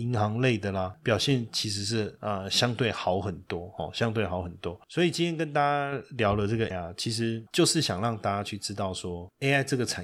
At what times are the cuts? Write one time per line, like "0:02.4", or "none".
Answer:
0:06.7